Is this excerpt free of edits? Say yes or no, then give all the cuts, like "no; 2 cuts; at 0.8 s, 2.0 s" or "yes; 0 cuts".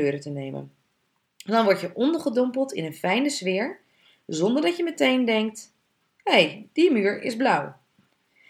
yes; 0 cuts